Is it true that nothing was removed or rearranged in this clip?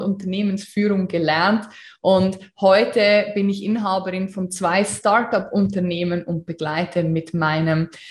yes; 0 cuts

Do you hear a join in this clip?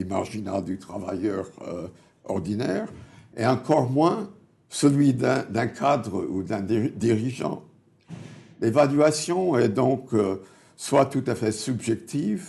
no; 0 cuts

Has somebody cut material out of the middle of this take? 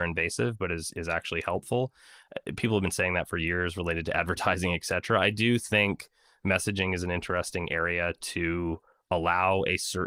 no; 0 cuts

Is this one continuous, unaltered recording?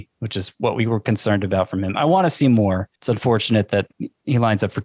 no; 1 cut; at 2.9 s

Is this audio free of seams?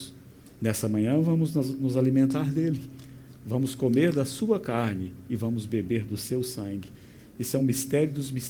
yes; 0 cuts

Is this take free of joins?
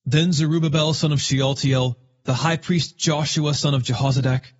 yes; 0 cuts

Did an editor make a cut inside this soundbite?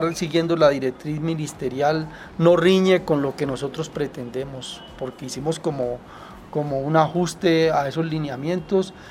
no; 0 cuts

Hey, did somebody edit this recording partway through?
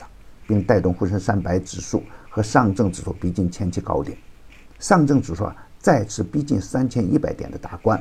no; 0 cuts

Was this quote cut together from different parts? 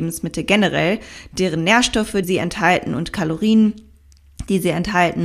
yes; 1 cut; at 2.2 s

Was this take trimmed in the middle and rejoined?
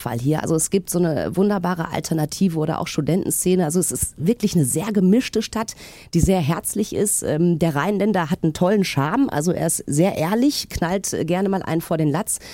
no; 0 cuts

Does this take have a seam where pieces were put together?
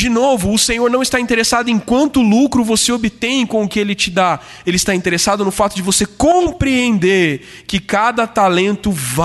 no; 0 cuts

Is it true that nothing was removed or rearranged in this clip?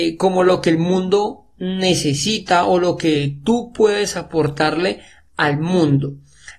yes; 0 cuts

